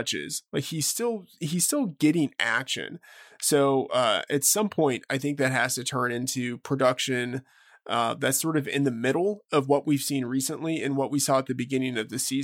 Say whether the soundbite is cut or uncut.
uncut